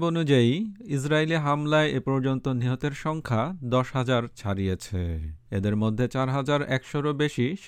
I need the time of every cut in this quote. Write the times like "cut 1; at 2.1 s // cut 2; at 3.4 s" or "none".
cut 1; at 5.5 s